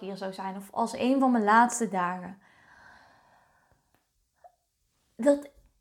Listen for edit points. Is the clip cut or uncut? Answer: uncut